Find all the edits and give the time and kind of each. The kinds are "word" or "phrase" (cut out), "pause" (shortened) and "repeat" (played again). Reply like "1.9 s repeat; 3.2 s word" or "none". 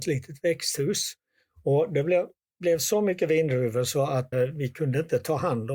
4.3 s word